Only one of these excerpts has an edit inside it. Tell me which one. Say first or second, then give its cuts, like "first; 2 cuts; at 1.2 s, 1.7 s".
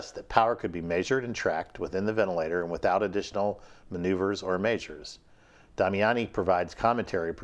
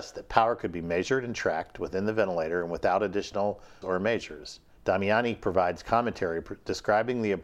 second; 2 cuts; at 3.8 s, 4.8 s